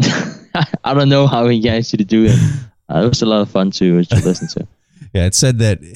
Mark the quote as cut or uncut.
uncut